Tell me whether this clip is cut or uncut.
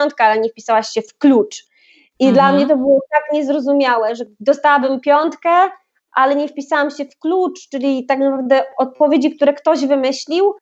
uncut